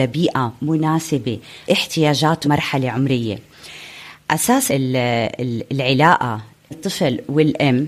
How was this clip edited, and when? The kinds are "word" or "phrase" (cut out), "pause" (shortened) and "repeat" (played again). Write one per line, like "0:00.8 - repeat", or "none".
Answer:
0:01.7 - word
0:02.4 - word
0:04.7 - word
0:06.7 - word

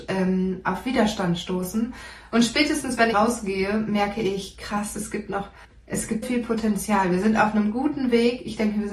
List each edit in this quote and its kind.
0:03.1 - phrase
0:05.6 - pause
0:06.2 - word

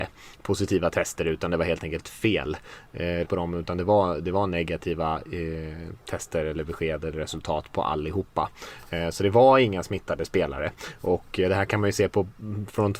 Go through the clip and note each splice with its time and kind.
0:03.2 - word

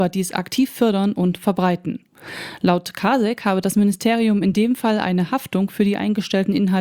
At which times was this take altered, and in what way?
none

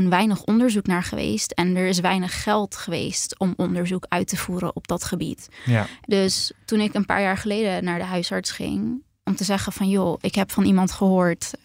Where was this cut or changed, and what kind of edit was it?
none

